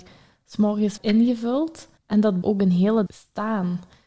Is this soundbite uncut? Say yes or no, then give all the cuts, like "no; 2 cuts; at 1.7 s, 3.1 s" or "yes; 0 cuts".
no; 4 cuts; at 1.0 s, 2.0 s, 2.4 s, 3.1 s